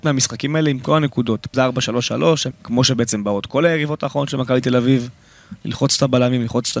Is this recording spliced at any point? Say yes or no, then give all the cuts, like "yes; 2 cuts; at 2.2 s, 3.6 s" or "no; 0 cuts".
yes; 2 cuts; at 1.5 s, 2.5 s